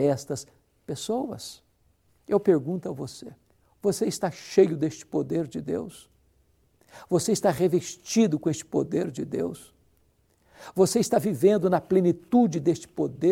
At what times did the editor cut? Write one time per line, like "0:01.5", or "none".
0:03.5